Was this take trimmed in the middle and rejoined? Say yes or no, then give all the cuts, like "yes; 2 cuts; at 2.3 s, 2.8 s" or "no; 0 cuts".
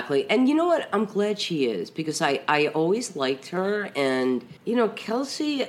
yes; 1 cut; at 4.6 s